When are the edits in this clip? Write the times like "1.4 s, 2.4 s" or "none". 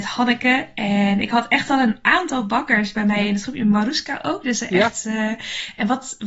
none